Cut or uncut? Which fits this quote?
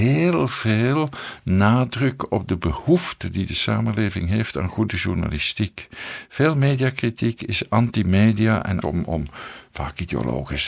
cut